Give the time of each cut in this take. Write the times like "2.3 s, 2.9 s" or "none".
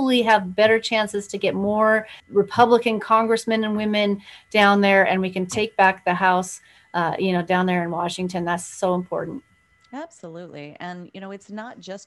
2.2 s